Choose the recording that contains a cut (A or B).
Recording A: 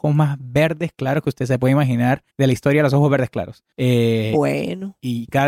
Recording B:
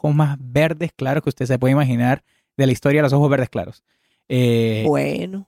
A